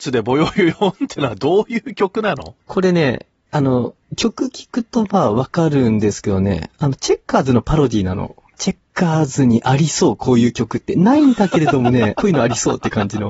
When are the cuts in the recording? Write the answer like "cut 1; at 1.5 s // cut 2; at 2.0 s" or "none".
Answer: cut 1; at 8.5 s // cut 2; at 12.1 s